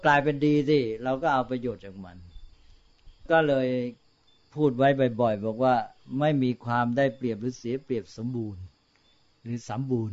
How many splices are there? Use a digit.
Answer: 0